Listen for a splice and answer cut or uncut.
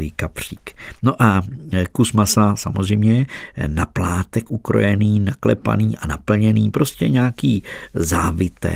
uncut